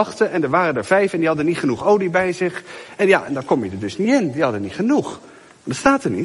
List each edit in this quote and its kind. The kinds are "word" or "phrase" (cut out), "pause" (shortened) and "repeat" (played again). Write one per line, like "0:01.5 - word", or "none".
none